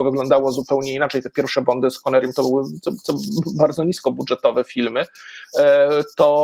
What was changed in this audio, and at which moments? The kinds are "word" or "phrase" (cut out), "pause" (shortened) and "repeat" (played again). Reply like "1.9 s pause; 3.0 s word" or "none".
none